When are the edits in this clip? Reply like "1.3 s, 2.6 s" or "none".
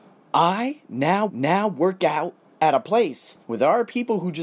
1.3 s, 3.4 s